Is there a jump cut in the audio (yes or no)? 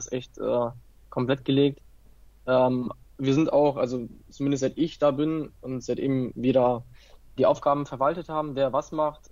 yes